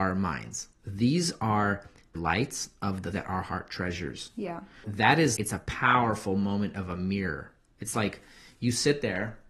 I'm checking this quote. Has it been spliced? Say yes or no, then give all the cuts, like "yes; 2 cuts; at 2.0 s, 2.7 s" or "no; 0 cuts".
yes; 4 cuts; at 2.1 s, 3.1 s, 4.8 s, 5.4 s